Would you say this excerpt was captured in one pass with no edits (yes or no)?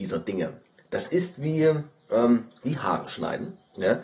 yes